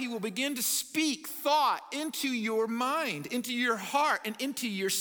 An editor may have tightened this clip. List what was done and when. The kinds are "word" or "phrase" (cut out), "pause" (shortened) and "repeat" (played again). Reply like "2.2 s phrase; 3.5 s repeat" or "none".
none